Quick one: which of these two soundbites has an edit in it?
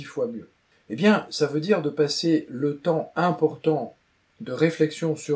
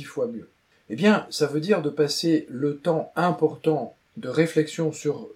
second; 1 cut; at 4.1 s

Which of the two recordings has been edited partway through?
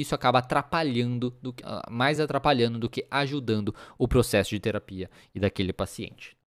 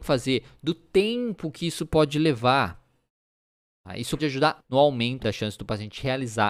second; 3 cuts; at 4.2 s, 4.6 s, 5.2 s

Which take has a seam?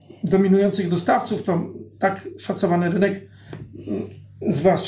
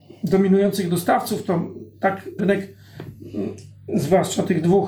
second; 1 cut; at 2.4 s

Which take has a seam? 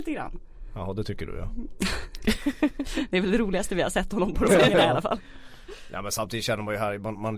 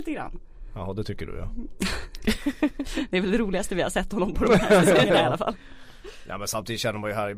first; 1 cut; at 4.5 s

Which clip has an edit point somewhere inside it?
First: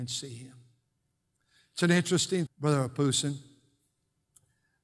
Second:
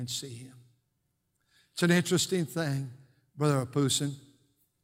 first; 1 cut; at 2.5 s

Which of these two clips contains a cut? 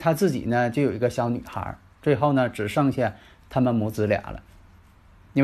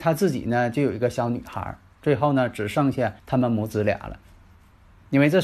second; 1 cut; at 3.2 s

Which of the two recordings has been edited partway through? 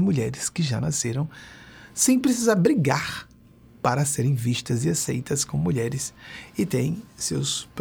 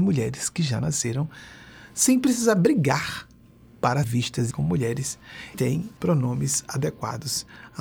second; 4 cuts; at 4.0 s, 4.5 s, 5.5 s, 6.0 s

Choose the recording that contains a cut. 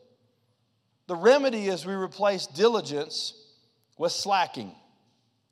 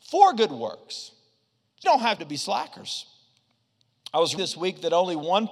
second; 3 cuts; at 1.8 s, 2.2 s, 4.4 s

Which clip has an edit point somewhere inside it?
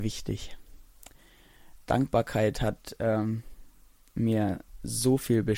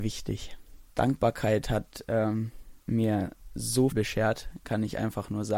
second; 3 cuts; at 0.9 s, 2.8 s, 3.9 s

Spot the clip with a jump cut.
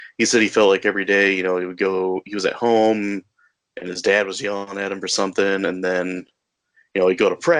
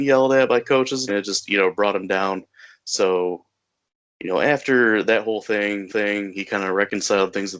second; 2 cuts; at 1.1 s, 5.9 s

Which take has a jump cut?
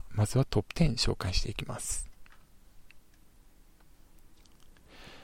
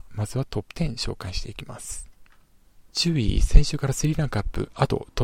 second; 1 cut; at 2.9 s

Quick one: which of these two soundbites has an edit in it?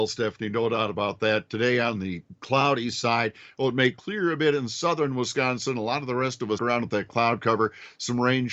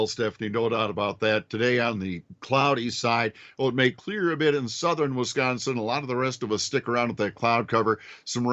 first; 1 cut; at 6.6 s

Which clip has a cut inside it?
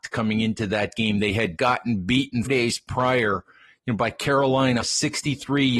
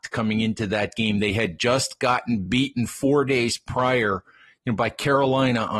first; 3 cuts; at 1.6 s, 2.5 s, 4.8 s

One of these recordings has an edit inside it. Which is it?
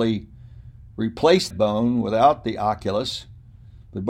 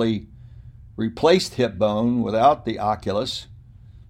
first; 1 cut; at 1.5 s

